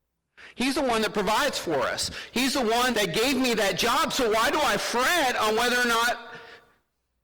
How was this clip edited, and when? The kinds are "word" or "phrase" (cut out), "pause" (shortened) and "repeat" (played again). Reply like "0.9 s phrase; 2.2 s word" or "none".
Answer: 2.9 s word